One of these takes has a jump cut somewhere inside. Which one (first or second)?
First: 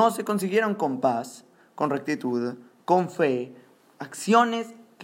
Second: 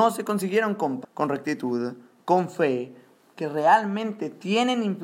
second